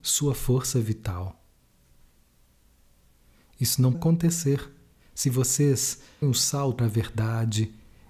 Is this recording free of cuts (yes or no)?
no